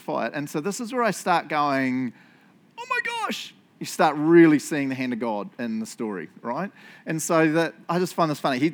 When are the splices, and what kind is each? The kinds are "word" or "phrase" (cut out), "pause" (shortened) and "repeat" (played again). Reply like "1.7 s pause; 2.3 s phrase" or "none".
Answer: none